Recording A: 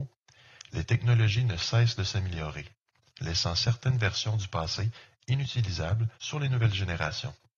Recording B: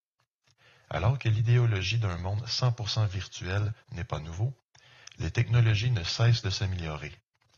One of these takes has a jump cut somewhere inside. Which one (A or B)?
A